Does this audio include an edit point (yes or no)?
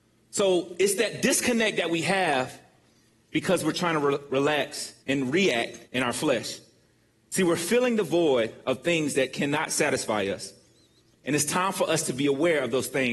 yes